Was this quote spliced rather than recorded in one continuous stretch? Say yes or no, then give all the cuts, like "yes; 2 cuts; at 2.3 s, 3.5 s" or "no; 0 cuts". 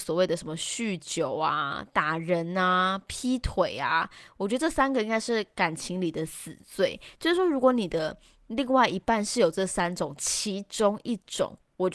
no; 0 cuts